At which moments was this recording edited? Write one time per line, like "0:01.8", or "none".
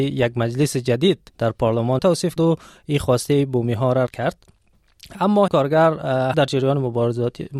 0:01.3
0:02.0
0:02.4
0:04.1
0:05.5
0:06.3